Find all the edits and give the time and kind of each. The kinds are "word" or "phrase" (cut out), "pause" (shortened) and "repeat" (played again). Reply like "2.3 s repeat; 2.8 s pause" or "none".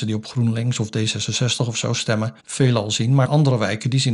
2.4 s pause; 3.2 s word